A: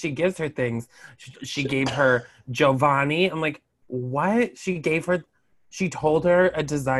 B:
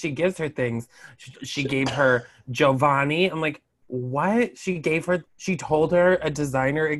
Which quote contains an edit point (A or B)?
B